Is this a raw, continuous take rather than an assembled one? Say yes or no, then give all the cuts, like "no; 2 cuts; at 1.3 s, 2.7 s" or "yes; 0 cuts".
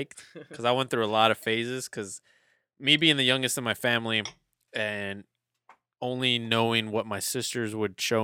yes; 0 cuts